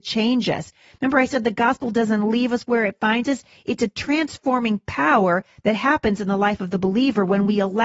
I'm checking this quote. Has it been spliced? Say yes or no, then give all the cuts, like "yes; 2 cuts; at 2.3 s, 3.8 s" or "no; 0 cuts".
no; 0 cuts